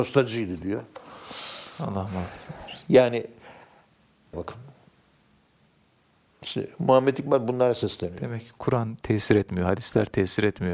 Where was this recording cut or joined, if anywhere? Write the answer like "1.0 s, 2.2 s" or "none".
4.3 s